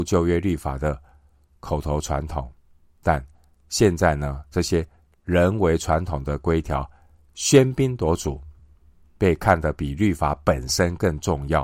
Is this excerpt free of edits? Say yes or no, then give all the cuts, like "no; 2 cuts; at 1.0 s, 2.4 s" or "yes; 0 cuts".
yes; 0 cuts